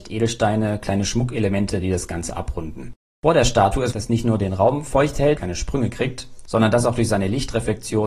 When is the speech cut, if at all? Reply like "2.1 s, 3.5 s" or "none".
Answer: 3.9 s, 5.4 s